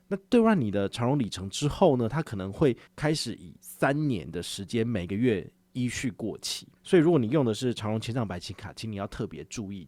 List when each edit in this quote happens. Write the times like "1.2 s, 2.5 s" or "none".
2.9 s, 6.8 s